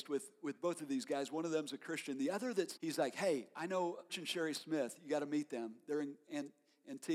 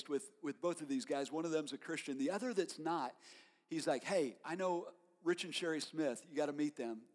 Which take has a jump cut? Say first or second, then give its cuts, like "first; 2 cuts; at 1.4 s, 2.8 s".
first; 2 cuts; at 2.8 s, 4.1 s